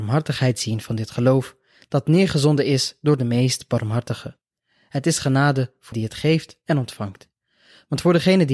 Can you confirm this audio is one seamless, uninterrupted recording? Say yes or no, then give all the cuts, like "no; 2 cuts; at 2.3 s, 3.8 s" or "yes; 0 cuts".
no; 1 cut; at 5.9 s